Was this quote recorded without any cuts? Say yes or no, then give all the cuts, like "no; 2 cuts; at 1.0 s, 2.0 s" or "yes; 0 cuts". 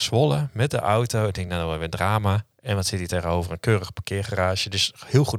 yes; 0 cuts